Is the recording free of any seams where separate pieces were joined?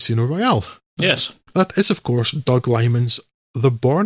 yes; 0 cuts

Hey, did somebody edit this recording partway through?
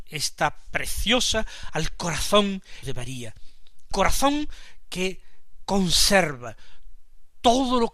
yes; 3 cuts; at 1.7 s, 2.8 s, 3.9 s

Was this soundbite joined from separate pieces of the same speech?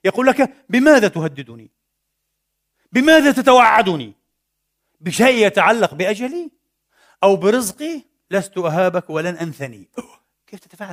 no; 0 cuts

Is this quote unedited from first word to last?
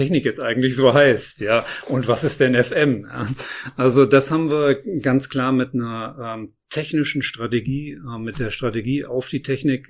yes; 0 cuts

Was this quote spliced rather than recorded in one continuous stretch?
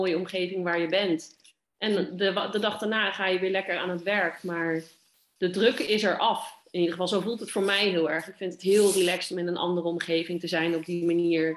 no; 0 cuts

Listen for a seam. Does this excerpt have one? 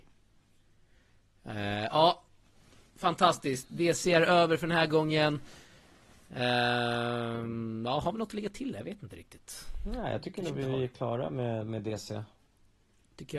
no; 0 cuts

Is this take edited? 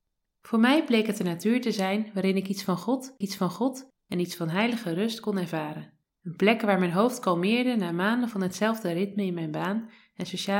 yes; 2 cuts; at 3.2 s, 6.0 s

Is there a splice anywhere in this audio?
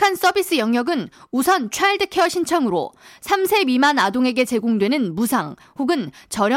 no; 0 cuts

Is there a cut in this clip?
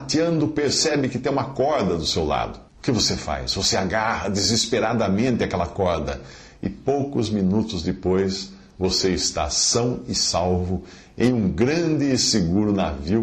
yes; 1 cut; at 2.7 s

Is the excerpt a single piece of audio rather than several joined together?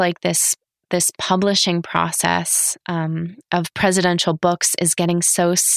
yes; 0 cuts

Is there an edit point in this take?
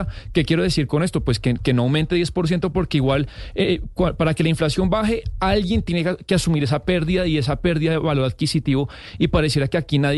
no; 0 cuts

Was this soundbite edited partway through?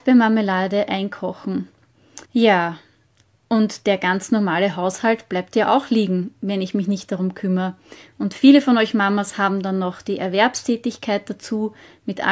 yes; 1 cut; at 2.2 s

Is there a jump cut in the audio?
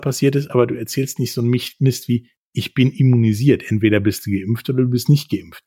no; 0 cuts

